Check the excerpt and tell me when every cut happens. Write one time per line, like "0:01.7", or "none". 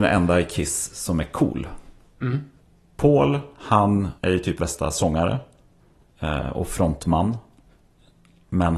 0:02.6
0:04.2
0:04.6